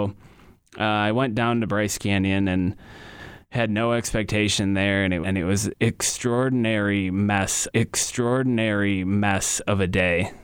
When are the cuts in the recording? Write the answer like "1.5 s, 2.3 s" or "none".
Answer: 5.2 s, 7.7 s